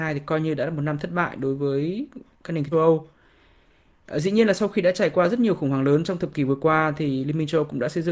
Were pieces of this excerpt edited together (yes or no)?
yes